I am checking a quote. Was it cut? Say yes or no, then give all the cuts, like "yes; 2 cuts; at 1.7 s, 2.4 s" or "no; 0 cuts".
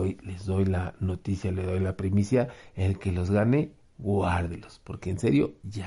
no; 0 cuts